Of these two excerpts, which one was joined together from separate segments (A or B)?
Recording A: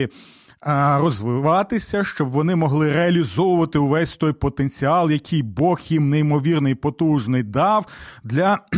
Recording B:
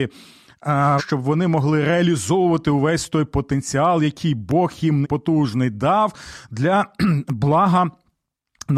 B